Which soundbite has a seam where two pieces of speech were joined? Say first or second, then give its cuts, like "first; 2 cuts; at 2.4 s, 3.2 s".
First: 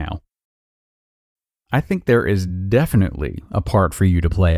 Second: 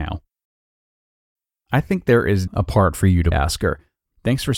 second; 2 cuts; at 2.5 s, 3.3 s